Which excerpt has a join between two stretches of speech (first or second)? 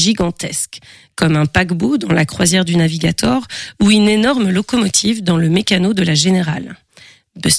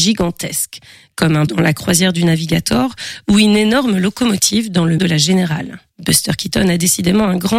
second